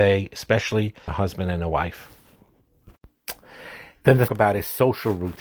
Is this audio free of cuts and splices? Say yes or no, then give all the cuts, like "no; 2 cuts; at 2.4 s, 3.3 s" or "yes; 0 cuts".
no; 2 cuts; at 1.1 s, 4.3 s